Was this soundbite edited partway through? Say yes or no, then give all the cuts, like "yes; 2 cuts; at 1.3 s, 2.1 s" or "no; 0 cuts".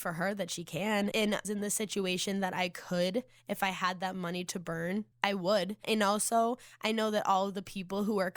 yes; 4 cuts; at 1.1 s, 1.4 s, 5.1 s, 5.8 s